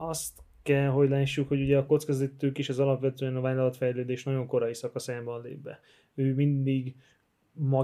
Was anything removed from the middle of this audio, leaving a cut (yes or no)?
no